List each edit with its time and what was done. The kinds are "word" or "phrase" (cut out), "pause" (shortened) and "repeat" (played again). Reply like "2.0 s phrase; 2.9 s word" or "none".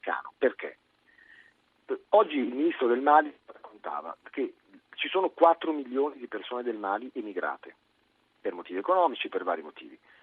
none